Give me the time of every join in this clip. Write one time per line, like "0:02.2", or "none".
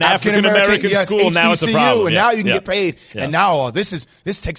none